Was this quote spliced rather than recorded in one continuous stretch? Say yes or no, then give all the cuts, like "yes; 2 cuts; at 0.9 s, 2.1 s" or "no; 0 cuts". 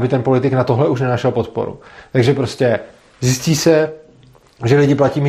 no; 0 cuts